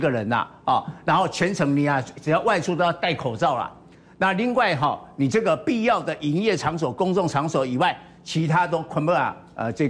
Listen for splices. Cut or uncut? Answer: uncut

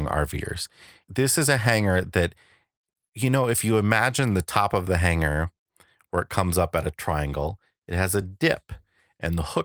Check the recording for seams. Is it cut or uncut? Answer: uncut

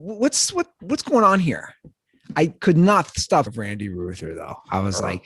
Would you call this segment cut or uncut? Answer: cut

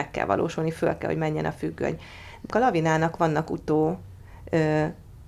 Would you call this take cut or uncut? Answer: cut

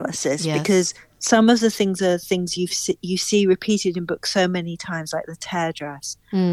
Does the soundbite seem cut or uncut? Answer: uncut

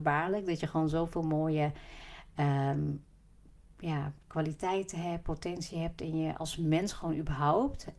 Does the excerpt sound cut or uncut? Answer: uncut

